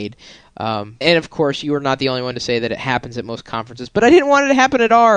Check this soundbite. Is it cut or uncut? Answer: cut